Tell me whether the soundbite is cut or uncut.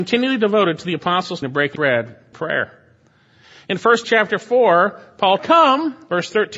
cut